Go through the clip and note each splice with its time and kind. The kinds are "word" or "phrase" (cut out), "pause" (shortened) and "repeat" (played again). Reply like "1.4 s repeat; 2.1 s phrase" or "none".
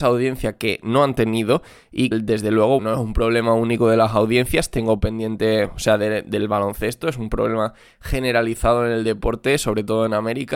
2.1 s word; 2.8 s word